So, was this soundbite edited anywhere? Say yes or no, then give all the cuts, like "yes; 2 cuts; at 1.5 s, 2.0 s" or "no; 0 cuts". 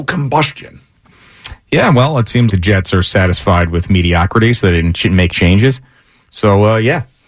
yes; 2 cuts; at 2.5 s, 5.3 s